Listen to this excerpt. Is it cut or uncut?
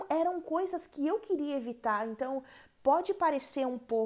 uncut